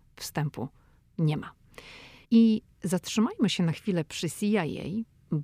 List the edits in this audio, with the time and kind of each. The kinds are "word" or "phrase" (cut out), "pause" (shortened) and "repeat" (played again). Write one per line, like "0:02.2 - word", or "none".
0:02.2 - pause